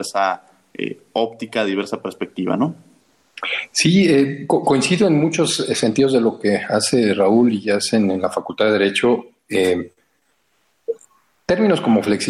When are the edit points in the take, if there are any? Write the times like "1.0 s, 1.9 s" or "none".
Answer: none